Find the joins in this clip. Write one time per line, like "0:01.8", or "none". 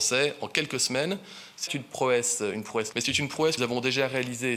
0:01.7
0:02.9
0:03.6